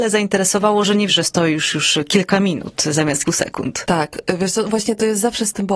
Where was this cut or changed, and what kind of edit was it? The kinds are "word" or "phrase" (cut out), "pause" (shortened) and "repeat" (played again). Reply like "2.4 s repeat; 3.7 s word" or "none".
1.1 s word; 3.2 s word